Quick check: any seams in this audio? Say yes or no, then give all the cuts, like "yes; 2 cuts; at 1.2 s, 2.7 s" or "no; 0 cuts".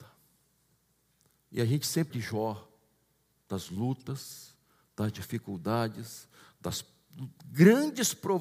yes; 1 cut; at 2.1 s